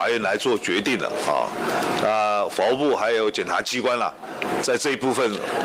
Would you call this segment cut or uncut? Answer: uncut